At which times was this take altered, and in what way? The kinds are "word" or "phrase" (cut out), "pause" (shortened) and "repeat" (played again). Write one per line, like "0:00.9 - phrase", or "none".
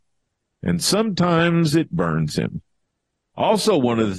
none